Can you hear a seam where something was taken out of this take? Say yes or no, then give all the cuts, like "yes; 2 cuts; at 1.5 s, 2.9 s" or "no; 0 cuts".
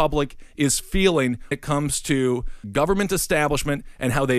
yes; 2 cuts; at 1.5 s, 2.6 s